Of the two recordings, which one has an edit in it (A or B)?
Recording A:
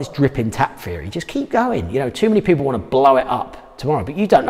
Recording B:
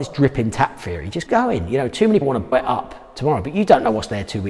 B